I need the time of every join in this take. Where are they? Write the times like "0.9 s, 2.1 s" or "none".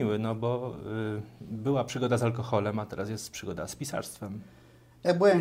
none